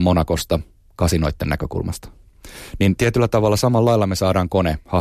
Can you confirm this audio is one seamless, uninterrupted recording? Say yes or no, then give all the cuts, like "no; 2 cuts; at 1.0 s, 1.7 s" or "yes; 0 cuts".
yes; 0 cuts